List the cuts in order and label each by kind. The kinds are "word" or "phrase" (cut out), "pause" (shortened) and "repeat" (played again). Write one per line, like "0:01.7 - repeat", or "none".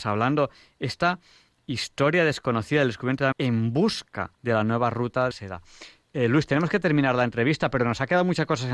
0:03.3 - word
0:04.3 - pause
0:05.3 - phrase